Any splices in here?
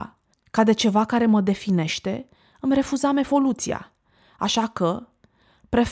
no; 0 cuts

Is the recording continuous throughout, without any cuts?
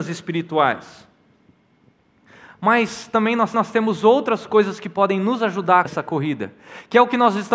no; 2 cuts; at 3.5 s, 5.8 s

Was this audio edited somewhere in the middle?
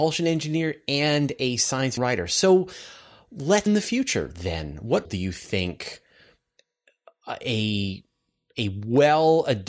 yes; 3 cuts; at 2.0 s, 3.7 s, 5.0 s

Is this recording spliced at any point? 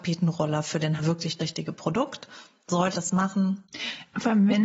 yes; 3 cuts; at 1.0 s, 1.4 s, 2.9 s

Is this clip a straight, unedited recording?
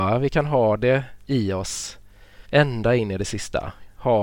no; 1 cut; at 2.4 s

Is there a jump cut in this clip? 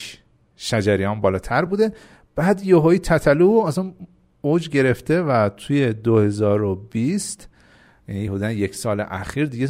no; 0 cuts

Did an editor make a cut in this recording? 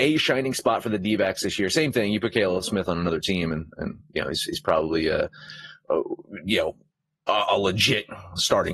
no; 0 cuts

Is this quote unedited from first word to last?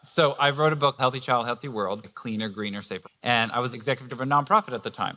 no; 5 cuts; at 1.0 s, 2.0 s, 3.0 s, 3.7 s, 4.1 s

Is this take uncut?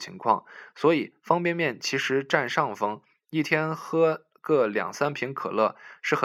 yes; 0 cuts

